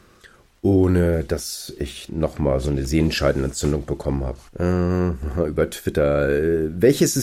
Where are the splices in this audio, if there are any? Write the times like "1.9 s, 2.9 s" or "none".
2.1 s, 4.5 s